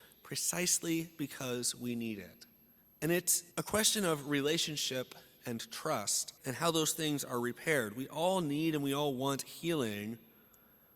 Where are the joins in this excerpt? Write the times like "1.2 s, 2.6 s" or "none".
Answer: 2.8 s, 3.5 s, 6.4 s